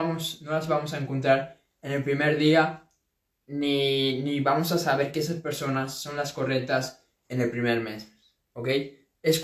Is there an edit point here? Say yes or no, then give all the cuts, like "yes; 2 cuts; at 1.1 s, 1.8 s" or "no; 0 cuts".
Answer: no; 0 cuts